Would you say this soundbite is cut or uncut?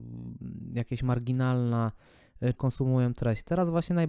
cut